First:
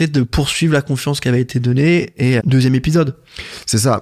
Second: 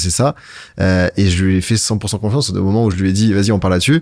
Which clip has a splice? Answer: first; 1 cut; at 2.4 s

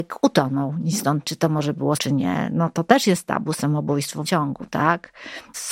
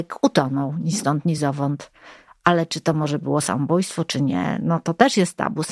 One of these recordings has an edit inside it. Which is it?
first; 3 cuts; at 1.2 s, 2.0 s, 4.2 s

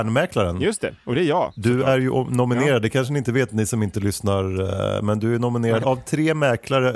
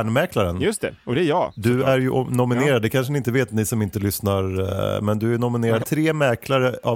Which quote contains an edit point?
second; 1 cut; at 5.8 s

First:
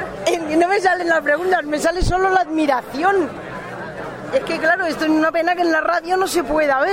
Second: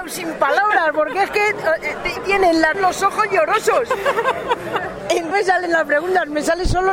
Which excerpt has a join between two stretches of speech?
second; 2 cuts; at 2.7 s, 5.3 s

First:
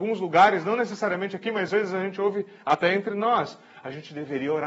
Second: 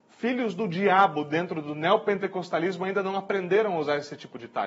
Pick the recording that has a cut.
first; 1 cut; at 1.7 s

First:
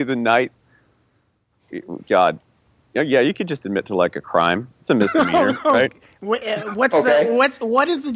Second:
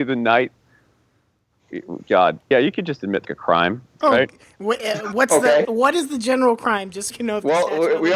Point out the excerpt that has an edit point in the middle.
second; 5 cuts; at 2.5 s, 3.2 s, 4.0 s, 5.6 s, 7.1 s

